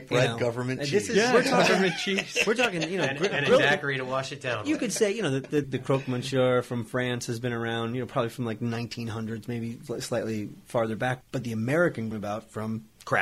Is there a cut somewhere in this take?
yes; 2 cuts; at 5.6 s, 12.1 s

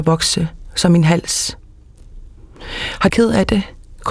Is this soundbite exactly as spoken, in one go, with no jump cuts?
no; 1 cut; at 3.1 s

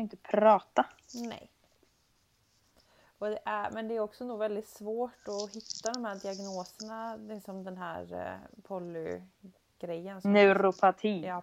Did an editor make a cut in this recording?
no; 0 cuts

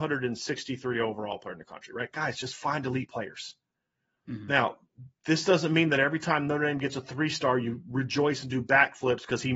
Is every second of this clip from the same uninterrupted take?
yes; 0 cuts

